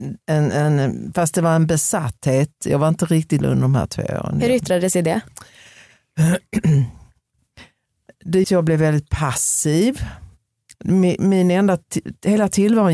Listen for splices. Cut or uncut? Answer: cut